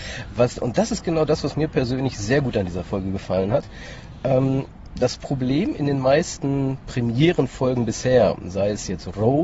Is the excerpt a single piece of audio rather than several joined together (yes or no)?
yes